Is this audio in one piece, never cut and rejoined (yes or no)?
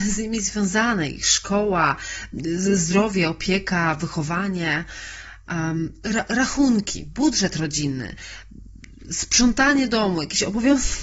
yes